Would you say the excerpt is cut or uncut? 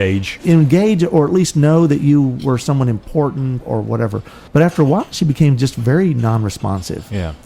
cut